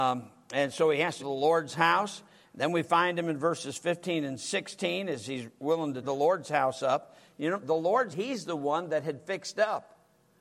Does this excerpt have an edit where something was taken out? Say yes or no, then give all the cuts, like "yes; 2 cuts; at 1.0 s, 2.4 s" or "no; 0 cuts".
yes; 4 cuts; at 1.2 s, 6.0 s, 7.6 s, 8.1 s